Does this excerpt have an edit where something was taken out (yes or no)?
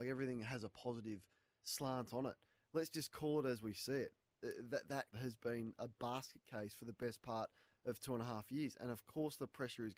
yes